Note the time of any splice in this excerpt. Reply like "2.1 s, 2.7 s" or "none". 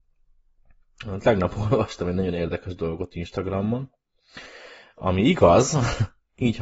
none

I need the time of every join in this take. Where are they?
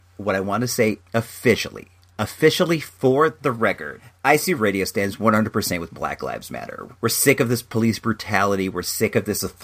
1.0 s, 4.6 s, 6.9 s

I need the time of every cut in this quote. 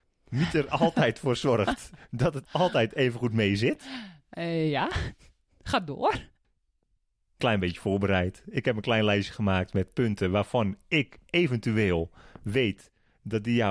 2.4 s, 7.4 s

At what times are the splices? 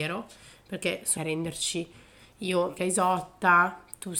1.2 s, 2.8 s

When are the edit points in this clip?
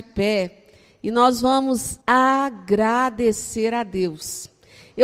2.0 s

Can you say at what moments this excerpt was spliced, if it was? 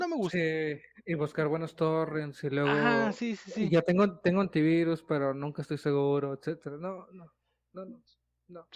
none

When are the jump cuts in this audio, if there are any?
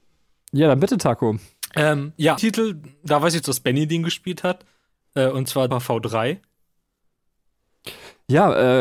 2.4 s, 3.4 s, 5.7 s

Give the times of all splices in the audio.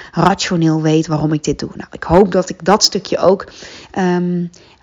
none

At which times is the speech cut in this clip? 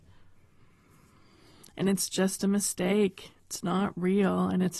3.4 s

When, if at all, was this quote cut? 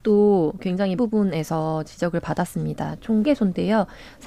1.0 s, 3.2 s

